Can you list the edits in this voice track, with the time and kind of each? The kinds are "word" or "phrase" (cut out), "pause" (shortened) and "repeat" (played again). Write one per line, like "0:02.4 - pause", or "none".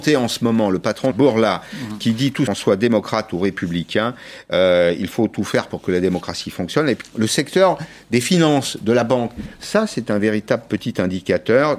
0:01.1 - phrase
0:02.5 - phrase
0:07.0 - word